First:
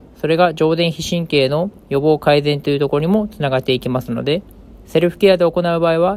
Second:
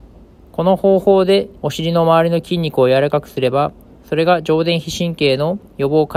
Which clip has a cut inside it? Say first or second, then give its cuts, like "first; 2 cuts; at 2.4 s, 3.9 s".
second; 1 cut; at 1.6 s